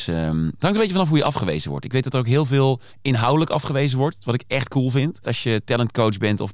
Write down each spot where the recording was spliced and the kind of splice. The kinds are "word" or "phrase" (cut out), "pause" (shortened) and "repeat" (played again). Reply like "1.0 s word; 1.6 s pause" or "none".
2.9 s pause; 5.2 s phrase